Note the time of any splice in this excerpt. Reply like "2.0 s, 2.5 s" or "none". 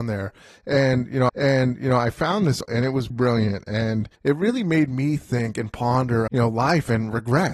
1.3 s, 2.6 s, 3.1 s, 4.1 s, 6.3 s